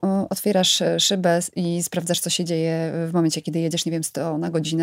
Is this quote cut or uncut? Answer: uncut